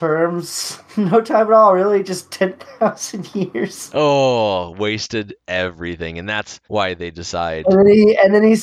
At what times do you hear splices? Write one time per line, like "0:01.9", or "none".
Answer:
0:06.6